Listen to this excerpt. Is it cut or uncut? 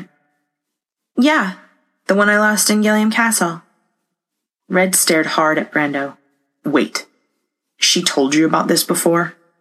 uncut